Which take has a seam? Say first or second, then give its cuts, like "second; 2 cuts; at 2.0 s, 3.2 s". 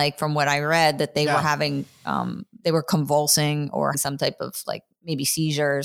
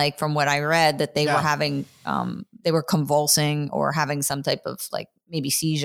first; 1 cut; at 3.9 s